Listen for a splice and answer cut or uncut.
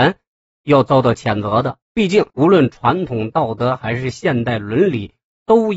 cut